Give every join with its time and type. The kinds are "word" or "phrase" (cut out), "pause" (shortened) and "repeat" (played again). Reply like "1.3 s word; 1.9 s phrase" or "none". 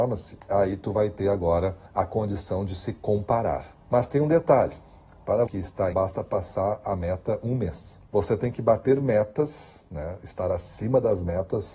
1.9 s pause; 3.8 s pause; 5.5 s phrase; 5.9 s phrase; 8.1 s pause